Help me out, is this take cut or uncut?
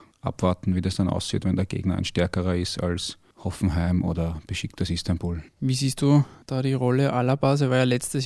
cut